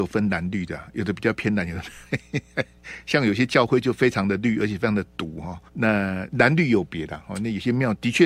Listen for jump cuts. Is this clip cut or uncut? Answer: cut